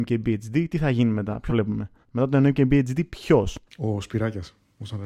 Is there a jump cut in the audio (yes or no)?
yes